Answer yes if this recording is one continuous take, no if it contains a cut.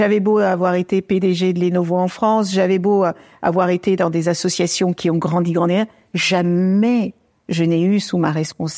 yes